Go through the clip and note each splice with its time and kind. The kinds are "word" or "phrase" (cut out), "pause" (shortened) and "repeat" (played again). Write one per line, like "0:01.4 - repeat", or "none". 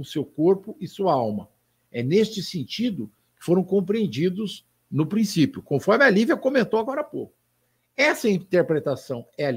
none